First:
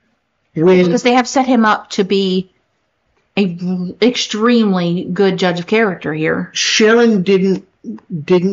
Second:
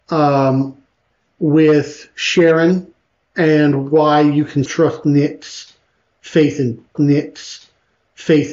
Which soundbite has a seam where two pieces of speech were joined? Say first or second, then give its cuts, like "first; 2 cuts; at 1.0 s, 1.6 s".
second; 2 cuts; at 4.7 s, 6.9 s